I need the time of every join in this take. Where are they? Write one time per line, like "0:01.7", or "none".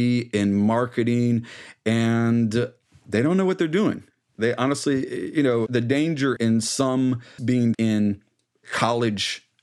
0:05.7
0:06.4
0:07.4
0:07.7